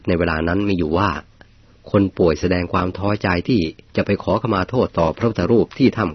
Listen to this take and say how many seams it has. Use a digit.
0